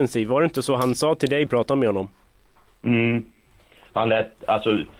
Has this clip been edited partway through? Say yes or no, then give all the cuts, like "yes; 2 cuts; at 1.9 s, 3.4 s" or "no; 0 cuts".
yes; 1 cut; at 1.5 s